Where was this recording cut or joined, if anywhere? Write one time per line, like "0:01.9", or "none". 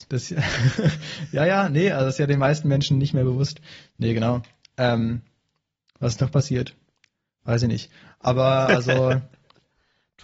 none